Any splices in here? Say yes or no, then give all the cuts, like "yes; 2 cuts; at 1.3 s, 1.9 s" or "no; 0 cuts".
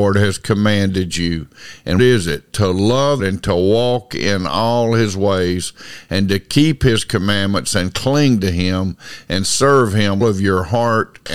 yes; 3 cuts; at 2.0 s, 3.2 s, 10.2 s